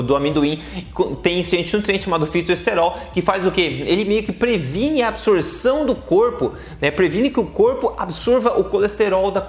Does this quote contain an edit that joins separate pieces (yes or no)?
no